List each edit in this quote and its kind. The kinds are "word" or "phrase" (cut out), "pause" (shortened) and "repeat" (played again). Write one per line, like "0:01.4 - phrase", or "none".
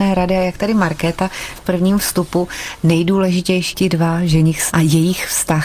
0:01.6 - word
0:03.7 - word
0:04.7 - word